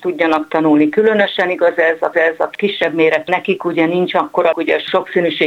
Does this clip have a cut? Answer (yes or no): yes